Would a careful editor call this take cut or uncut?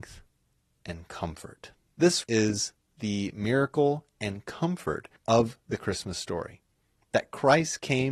cut